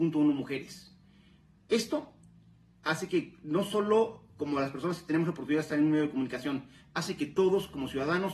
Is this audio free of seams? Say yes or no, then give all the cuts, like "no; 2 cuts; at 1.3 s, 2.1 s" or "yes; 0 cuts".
yes; 0 cuts